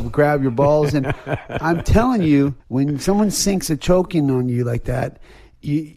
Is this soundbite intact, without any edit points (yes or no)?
no